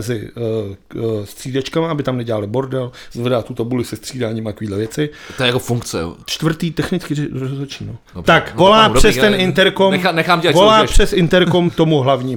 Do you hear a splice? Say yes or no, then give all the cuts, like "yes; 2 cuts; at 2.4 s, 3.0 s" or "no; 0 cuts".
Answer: yes; 3 cuts; at 6.2 s, 8.1 s, 8.6 s